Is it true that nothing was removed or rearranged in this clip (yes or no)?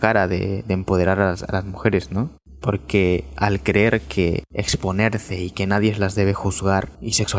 yes